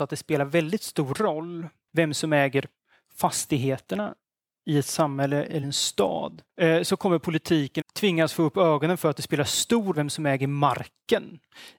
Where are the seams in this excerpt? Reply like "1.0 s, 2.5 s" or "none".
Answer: 5.6 s, 7.8 s, 9.9 s